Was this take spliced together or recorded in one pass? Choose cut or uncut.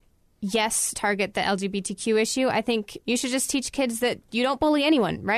cut